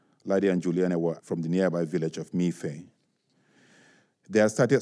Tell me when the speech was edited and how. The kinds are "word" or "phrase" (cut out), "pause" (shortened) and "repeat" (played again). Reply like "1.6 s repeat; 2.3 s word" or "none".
1.2 s word